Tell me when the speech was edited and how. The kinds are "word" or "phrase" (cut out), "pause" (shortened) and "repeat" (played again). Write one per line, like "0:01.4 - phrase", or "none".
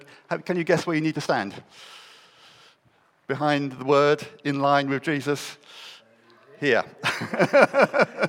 none